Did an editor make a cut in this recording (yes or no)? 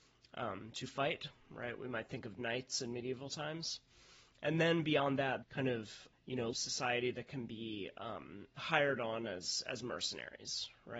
yes